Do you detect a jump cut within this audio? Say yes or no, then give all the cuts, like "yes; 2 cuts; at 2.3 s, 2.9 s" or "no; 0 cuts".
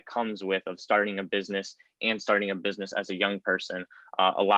no; 0 cuts